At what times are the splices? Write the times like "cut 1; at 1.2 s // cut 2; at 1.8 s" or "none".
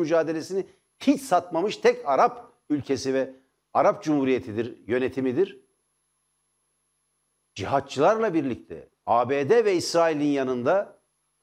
none

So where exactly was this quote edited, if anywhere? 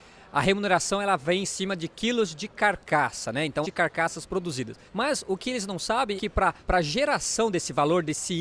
cut 1; at 3.6 s // cut 2; at 4.9 s // cut 3; at 6.2 s // cut 4; at 6.6 s

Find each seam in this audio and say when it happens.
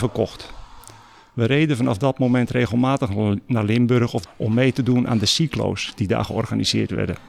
cut 1; at 4.3 s

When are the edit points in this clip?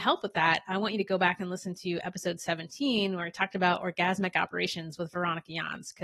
none

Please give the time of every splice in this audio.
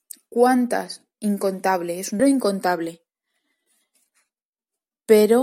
cut 1; at 2.2 s

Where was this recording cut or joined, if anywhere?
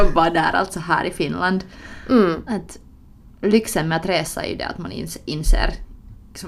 cut 1; at 3.2 s

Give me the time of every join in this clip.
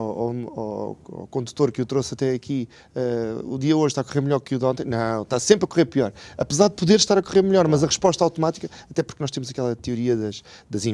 none

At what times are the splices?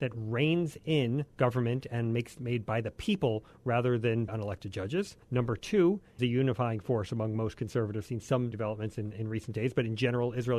cut 1; at 1.3 s // cut 2; at 2.4 s // cut 3; at 4.3 s // cut 4; at 5.2 s // cut 5; at 6.2 s // cut 6; at 8.1 s // cut 7; at 8.5 s // cut 8; at 9.1 s

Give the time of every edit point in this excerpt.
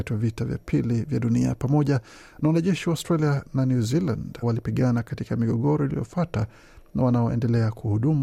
cut 1; at 4.4 s

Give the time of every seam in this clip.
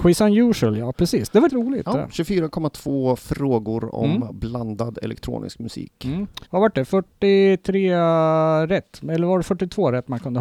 cut 1; at 1.5 s // cut 2; at 6.5 s

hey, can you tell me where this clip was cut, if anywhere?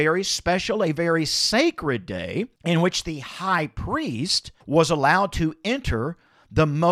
cut 1; at 2.6 s // cut 2; at 4.6 s

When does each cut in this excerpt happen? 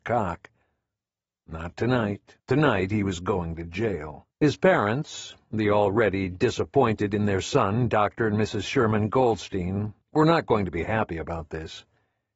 cut 1; at 2.4 s // cut 2; at 4.3 s // cut 3; at 10.0 s

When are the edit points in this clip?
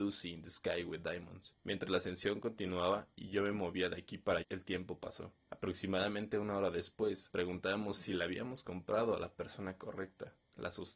cut 1; at 1.6 s // cut 2; at 4.4 s // cut 3; at 5.4 s // cut 4; at 7.3 s

